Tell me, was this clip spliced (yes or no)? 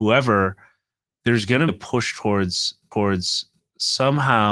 yes